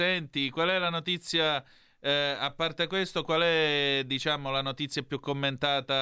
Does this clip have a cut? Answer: no; 0 cuts

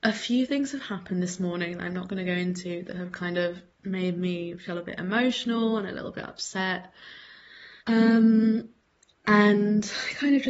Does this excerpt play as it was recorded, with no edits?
no; 2 cuts; at 3.7 s, 7.8 s

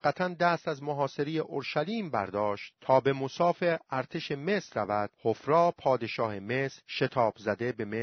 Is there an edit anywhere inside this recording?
no; 0 cuts

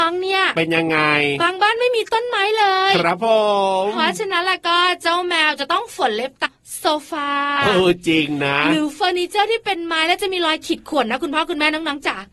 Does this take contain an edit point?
yes; 1 cut; at 6.5 s

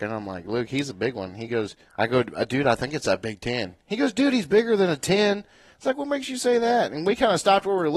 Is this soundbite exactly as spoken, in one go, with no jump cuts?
no; 1 cut; at 1.9 s

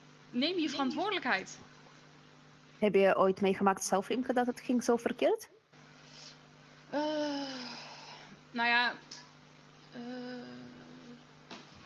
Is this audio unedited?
no; 1 cut; at 6.8 s

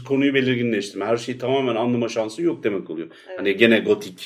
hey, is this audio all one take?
yes; 0 cuts

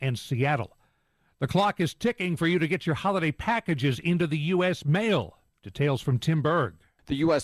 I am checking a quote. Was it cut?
no; 0 cuts

